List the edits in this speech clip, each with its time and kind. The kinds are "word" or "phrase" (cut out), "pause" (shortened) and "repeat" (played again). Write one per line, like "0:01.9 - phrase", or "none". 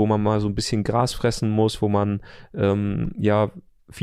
none

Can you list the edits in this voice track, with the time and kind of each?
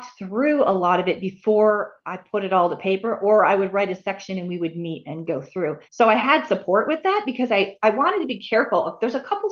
0:05.8 - pause

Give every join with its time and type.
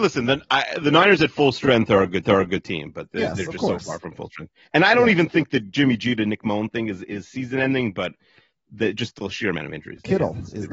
0:02.2 - repeat

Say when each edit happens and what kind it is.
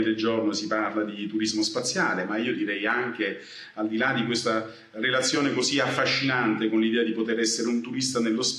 none

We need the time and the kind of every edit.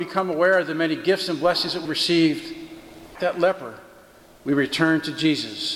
0:01.8 - word
0:03.1 - word

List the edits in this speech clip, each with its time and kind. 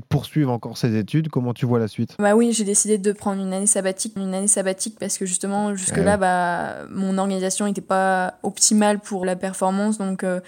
0:02.2 - word
0:04.2 - repeat
0:09.2 - word

